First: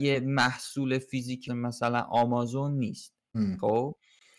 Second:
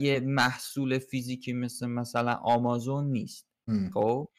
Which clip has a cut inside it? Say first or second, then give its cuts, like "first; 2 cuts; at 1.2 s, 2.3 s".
first; 1 cut; at 1.5 s